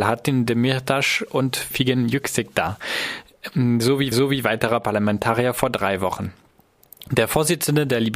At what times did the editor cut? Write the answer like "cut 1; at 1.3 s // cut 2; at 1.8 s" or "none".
cut 1; at 4.1 s